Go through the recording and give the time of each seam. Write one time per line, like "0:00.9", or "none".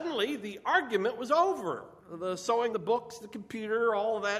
0:02.0
0:02.7